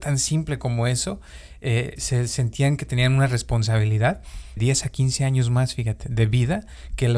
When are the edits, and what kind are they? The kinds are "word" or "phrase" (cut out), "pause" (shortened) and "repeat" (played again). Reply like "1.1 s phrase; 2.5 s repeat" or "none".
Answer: 2.0 s word; 4.6 s phrase

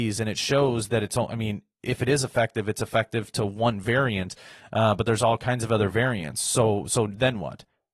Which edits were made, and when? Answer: none

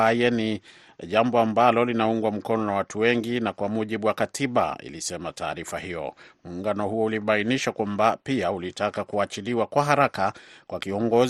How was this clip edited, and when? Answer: none

